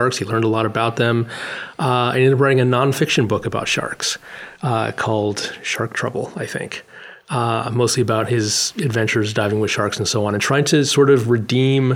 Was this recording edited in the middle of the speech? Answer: no; 0 cuts

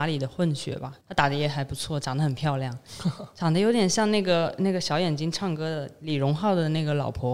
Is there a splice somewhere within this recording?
yes; 1 cut; at 1.0 s

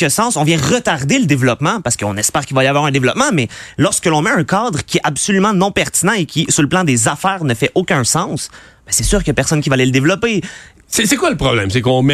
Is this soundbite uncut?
yes; 0 cuts

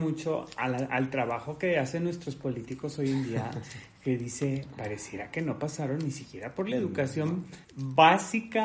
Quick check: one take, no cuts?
no; 1 cut; at 7.6 s

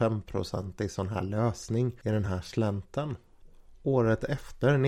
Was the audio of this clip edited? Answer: no; 0 cuts

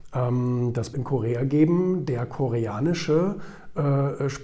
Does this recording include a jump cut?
yes; 1 cut; at 0.9 s

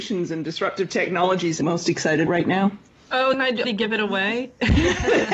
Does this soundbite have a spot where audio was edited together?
yes; 4 cuts; at 1.6 s, 2.3 s, 3.3 s, 3.6 s

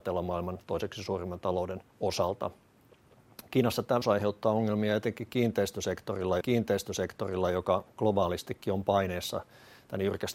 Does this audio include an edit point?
yes; 3 cuts; at 1.9 s, 4.0 s, 6.4 s

